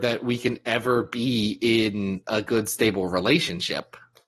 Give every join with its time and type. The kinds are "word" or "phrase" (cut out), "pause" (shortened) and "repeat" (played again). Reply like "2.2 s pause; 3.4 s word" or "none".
none